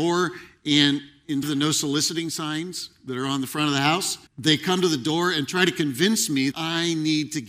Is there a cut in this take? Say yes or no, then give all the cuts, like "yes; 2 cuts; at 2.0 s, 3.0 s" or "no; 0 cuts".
yes; 3 cuts; at 1.4 s, 4.3 s, 6.5 s